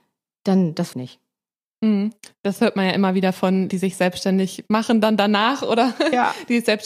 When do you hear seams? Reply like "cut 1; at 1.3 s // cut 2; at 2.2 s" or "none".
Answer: cut 1; at 0.9 s // cut 2; at 3.7 s